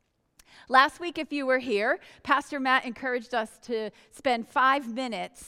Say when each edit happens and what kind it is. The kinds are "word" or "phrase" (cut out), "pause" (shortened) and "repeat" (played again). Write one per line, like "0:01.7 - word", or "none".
none